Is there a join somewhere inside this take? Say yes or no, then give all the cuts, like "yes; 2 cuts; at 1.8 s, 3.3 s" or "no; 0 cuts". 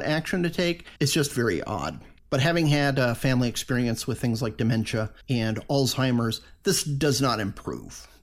yes; 3 cuts; at 1.0 s, 2.2 s, 5.2 s